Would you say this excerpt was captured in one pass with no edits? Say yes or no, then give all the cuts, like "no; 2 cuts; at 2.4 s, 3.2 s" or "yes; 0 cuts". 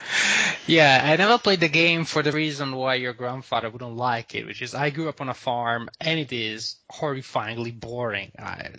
no; 2 cuts; at 2.3 s, 6.8 s